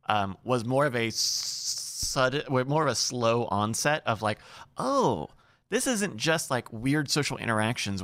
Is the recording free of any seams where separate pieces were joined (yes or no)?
yes